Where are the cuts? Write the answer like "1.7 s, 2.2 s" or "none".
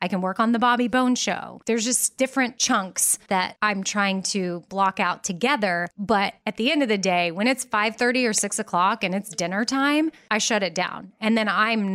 none